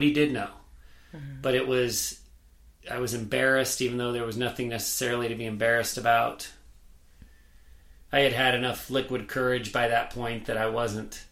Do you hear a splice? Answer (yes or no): no